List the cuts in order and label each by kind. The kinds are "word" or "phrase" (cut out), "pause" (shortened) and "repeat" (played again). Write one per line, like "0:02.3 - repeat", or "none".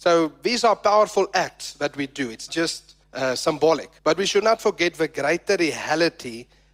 0:02.5 - word
0:03.0 - pause
0:04.0 - pause
0:04.4 - word

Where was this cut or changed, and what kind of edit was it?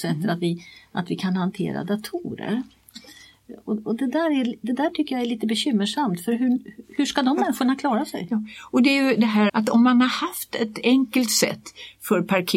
0:09.5 - word

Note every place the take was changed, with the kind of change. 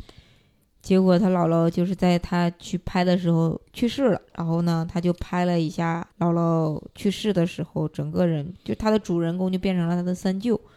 0:03.7 - pause
0:04.3 - pause
0:06.1 - pause

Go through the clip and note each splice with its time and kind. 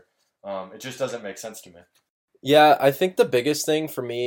none

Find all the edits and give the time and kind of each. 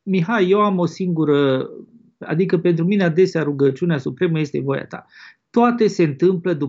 0:04.5 - word

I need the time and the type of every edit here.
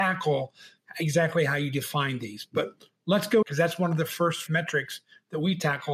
0:03.4 - phrase
0:04.5 - word

